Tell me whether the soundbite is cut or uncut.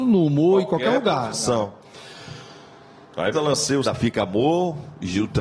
cut